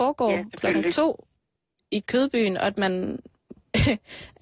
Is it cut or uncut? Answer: uncut